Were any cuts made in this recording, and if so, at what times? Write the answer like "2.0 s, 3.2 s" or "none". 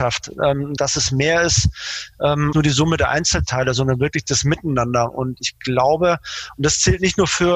2.5 s